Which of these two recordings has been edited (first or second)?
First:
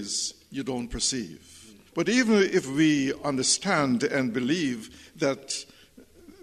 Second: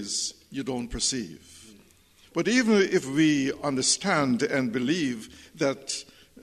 first